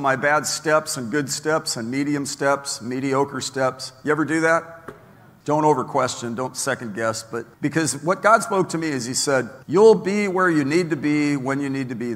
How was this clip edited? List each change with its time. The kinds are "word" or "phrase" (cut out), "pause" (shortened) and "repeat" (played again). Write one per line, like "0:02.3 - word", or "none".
0:07.5 - pause
0:09.6 - pause

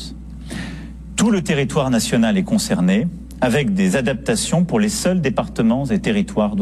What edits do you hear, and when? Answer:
none

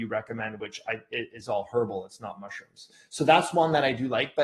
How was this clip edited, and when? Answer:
none

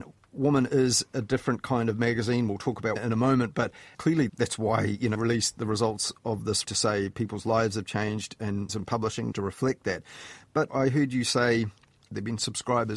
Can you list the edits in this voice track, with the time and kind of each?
0:03.0 - word
0:03.9 - word
0:04.3 - word
0:05.2 - word
0:06.2 - word
0:06.6 - word
0:08.7 - word
0:09.3 - word
0:10.7 - word

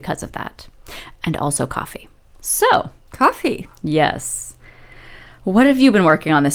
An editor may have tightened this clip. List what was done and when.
none

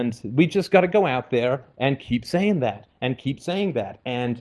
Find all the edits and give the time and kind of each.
none

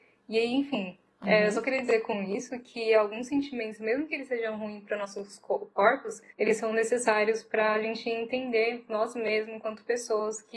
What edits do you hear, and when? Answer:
0:06.3 - pause

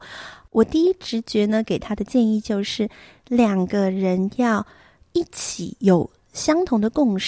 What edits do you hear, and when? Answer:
none

